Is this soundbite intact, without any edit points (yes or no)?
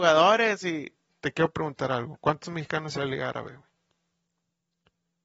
no